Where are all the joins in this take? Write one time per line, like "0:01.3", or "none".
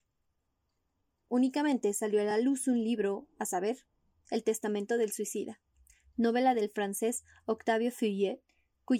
none